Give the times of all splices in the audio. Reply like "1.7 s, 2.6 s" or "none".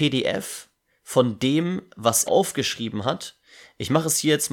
2.3 s